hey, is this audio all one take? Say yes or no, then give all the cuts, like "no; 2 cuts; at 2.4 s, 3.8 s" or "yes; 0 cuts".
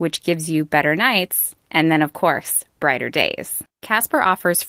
no; 1 cut; at 3.7 s